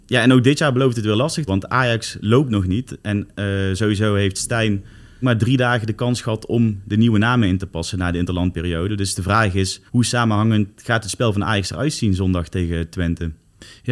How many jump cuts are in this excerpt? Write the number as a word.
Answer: three